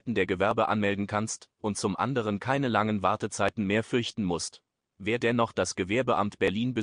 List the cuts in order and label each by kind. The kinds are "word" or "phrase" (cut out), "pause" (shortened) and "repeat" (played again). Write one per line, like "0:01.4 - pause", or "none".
none